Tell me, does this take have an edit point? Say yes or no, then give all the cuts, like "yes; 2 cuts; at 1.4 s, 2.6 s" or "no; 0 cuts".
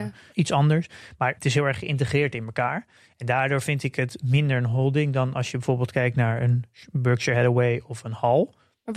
no; 0 cuts